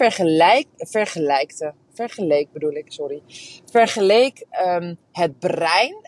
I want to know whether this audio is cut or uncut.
cut